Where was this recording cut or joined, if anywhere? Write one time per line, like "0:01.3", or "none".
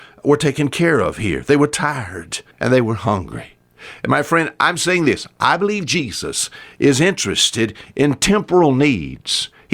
0:02.5